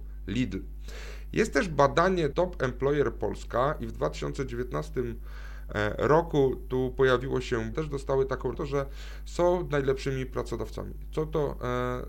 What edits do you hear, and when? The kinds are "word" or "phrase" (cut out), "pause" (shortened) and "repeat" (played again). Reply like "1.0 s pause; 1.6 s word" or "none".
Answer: 2.3 s word; 7.7 s phrase; 8.5 s phrase